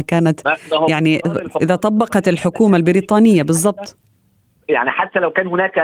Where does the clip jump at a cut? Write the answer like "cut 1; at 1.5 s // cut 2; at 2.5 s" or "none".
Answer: none